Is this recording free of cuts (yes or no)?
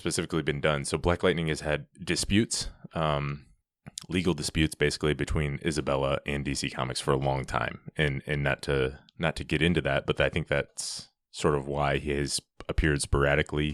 no